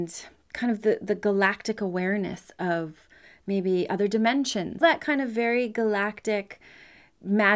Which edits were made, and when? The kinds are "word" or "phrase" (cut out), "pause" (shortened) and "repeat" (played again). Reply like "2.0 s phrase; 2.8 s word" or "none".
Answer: 4.8 s word